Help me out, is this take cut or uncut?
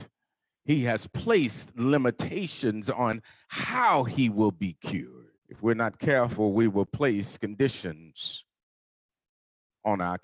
cut